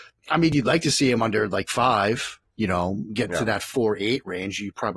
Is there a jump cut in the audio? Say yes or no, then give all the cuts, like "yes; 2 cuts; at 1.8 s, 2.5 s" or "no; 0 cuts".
no; 0 cuts